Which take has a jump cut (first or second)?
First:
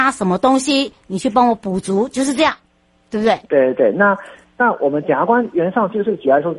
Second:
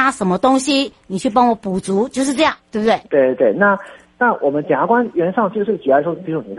second